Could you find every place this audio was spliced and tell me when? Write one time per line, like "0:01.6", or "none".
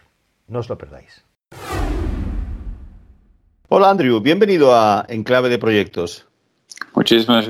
none